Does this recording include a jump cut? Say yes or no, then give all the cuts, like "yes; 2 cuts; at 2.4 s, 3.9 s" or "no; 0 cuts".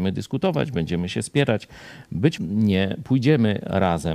yes; 1 cut; at 2.4 s